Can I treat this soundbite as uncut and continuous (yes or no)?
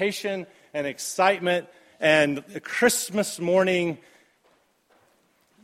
yes